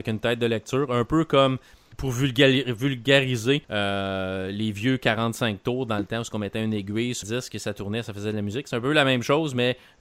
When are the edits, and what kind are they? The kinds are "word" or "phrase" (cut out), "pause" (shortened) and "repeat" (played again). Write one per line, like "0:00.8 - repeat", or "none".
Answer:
0:01.9 - word
0:03.6 - pause
0:07.2 - word